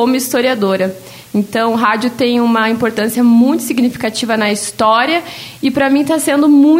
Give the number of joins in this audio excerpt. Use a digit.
0